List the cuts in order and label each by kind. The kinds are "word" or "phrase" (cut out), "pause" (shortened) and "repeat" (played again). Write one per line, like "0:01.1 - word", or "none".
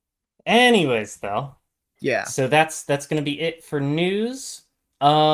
0:01.7 - pause